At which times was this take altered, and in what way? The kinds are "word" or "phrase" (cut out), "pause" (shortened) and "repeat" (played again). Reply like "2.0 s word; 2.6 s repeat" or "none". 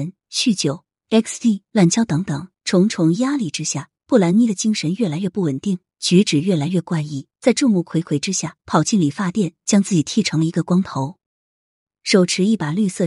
2.6 s pause; 4.0 s pause; 7.3 s pause; 8.6 s pause